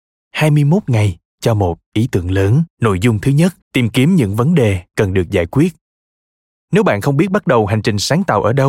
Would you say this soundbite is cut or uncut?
cut